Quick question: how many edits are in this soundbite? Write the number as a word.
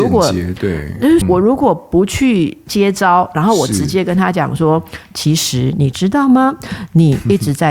one